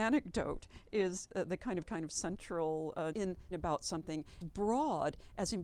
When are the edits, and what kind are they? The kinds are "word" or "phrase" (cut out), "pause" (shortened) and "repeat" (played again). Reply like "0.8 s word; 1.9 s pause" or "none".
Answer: 1.3 s word; 1.8 s word; 3.1 s word; 3.5 s word; 4.4 s word